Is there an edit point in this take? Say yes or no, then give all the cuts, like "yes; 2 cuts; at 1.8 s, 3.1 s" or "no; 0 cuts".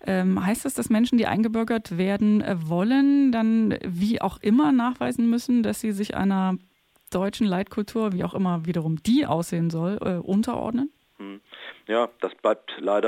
no; 0 cuts